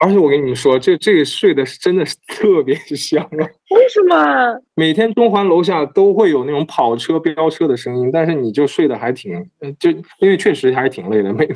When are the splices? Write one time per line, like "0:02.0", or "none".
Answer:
0:10.1